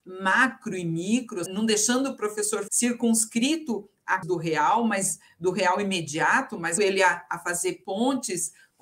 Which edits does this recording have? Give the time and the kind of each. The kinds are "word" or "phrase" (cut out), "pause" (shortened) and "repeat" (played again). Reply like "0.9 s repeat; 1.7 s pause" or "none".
1.5 s word; 2.7 s word; 4.2 s word; 6.8 s word